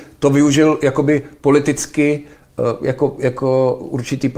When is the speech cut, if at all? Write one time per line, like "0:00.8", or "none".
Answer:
none